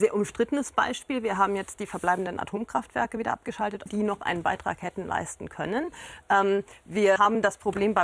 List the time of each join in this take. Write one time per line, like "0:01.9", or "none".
0:03.9
0:07.2